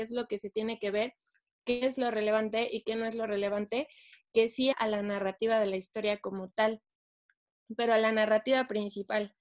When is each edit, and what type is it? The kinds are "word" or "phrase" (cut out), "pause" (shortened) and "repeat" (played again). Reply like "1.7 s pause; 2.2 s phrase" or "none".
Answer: 4.7 s word

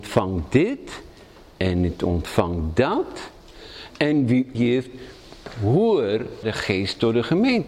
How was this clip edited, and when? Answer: 4.5 s word; 6.4 s word

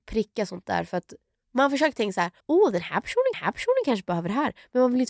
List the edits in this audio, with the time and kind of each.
1.4 s pause; 2.4 s pause; 3.3 s repeat

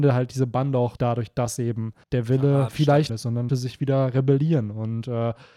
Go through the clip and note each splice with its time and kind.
1.0 s word; 2.0 s pause; 3.1 s phrase; 3.5 s word

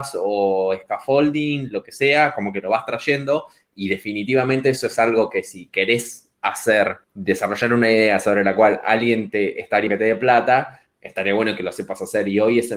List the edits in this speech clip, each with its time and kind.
7.0 s pause; 9.9 s word

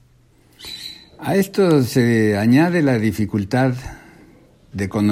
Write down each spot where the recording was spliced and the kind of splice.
none

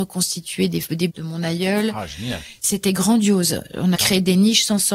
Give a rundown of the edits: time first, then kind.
1.1 s word; 3.9 s word

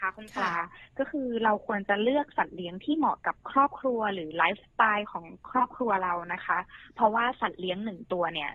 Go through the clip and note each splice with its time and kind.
3.4 s pause

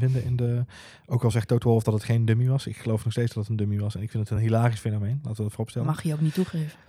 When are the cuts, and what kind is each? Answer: none

